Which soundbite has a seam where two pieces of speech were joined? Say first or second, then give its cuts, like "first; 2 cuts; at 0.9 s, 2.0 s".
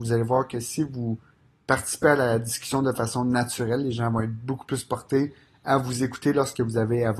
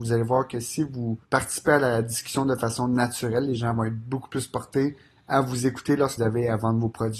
second; 2 cuts; at 1.2 s, 6.2 s